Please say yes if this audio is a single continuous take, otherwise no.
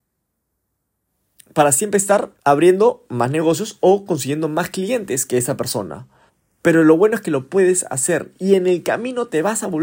no